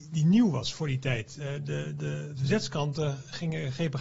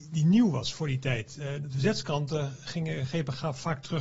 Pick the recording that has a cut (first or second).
second